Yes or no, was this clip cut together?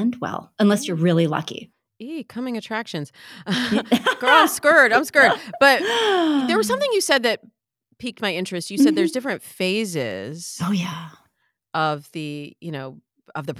no